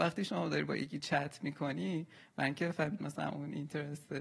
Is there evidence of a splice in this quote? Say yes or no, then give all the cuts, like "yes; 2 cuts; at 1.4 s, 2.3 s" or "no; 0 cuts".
yes; 1 cut; at 3.0 s